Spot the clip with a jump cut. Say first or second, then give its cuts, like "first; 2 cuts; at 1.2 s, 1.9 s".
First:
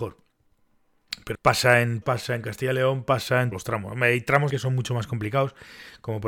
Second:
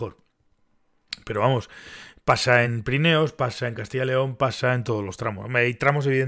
first; 4 cuts; at 1.3 s, 2.0 s, 3.5 s, 4.5 s